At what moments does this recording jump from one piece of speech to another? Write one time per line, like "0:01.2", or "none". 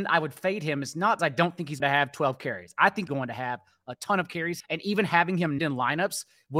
0:01.2
0:01.8
0:03.1
0:04.6
0:05.6